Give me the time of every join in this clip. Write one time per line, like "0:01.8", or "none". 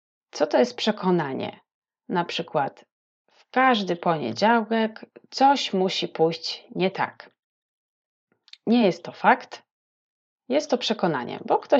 none